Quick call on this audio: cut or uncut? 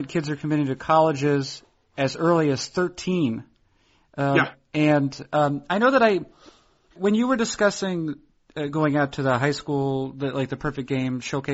cut